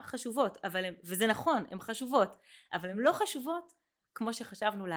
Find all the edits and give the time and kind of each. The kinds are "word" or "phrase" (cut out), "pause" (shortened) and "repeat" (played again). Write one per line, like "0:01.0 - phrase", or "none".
none